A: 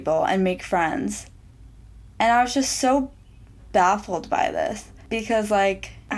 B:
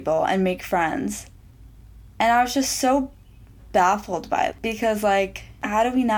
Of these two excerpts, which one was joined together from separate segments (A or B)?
B